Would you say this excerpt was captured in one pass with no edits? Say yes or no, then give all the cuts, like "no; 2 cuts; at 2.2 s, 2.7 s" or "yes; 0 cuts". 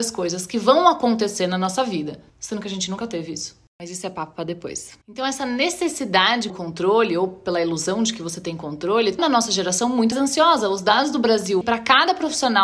no; 6 cuts; at 2.3 s, 5.0 s, 6.5 s, 9.2 s, 10.1 s, 11.6 s